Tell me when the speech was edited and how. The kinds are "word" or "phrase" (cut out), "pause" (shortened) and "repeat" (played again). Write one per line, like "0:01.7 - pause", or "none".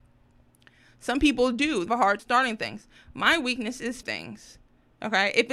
0:01.9 - word
0:02.2 - word
0:04.0 - word